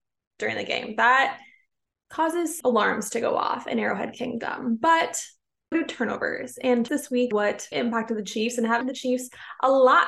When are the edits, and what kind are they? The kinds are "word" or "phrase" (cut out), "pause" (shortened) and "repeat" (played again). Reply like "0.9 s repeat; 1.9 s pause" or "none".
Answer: 2.6 s word; 5.7 s word; 6.9 s word; 7.3 s word; 7.7 s word; 8.8 s word